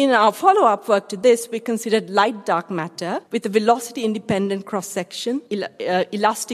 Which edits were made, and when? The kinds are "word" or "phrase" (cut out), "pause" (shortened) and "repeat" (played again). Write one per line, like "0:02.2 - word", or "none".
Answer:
0:03.3 - pause
0:05.5 - pause